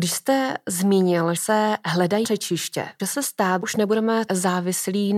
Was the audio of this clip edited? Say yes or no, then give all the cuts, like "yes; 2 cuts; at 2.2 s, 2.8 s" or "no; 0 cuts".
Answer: yes; 5 cuts; at 1.4 s, 2.2 s, 3.0 s, 3.6 s, 4.3 s